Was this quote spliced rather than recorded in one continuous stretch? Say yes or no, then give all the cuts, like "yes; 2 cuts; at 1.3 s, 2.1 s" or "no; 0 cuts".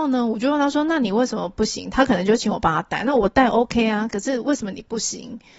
no; 0 cuts